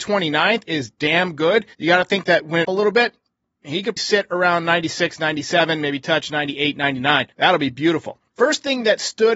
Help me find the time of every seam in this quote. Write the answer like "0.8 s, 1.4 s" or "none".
1.7 s, 2.6 s, 4.0 s, 7.3 s, 8.3 s